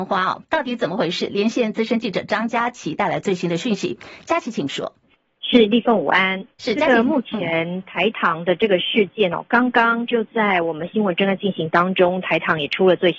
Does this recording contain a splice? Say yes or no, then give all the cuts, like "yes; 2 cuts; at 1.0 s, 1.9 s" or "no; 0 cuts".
yes; 2 cuts; at 5.0 s, 6.5 s